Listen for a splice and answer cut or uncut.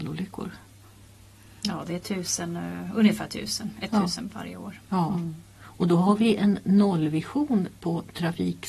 uncut